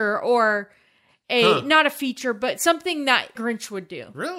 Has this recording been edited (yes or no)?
yes